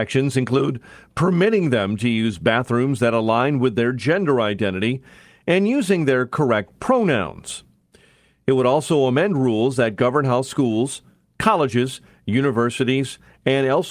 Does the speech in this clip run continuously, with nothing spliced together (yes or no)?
yes